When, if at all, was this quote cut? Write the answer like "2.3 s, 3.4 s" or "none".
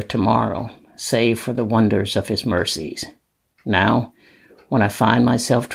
none